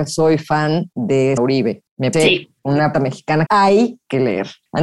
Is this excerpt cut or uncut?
cut